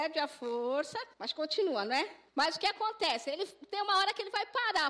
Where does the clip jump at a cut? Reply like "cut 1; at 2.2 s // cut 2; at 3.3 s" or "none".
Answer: cut 1; at 1.1 s // cut 2; at 2.3 s